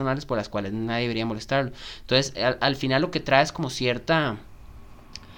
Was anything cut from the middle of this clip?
no; 0 cuts

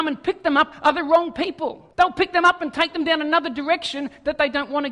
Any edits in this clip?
yes; 1 cut; at 1.9 s

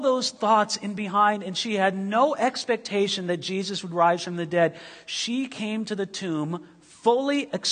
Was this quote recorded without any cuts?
yes; 0 cuts

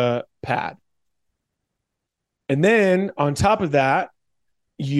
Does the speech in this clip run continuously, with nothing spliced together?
yes; 0 cuts

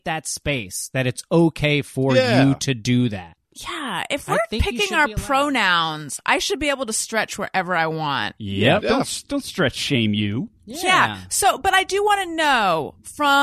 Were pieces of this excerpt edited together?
yes; 2 cuts; at 3.4 s, 10.6 s

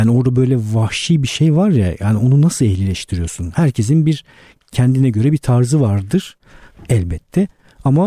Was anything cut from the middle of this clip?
no; 0 cuts

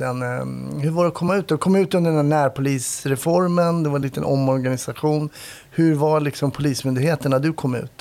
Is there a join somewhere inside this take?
no; 0 cuts

